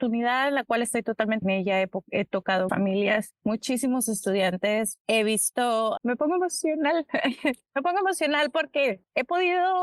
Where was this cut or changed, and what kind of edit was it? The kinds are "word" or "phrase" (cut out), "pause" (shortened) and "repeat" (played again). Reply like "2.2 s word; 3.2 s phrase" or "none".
1.4 s phrase; 2.7 s word; 6.0 s word